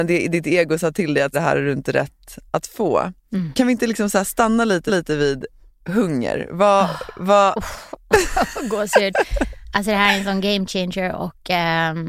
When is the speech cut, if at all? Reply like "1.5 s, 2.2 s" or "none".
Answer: 1.3 s, 4.9 s